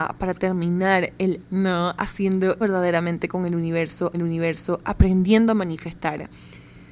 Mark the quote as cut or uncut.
cut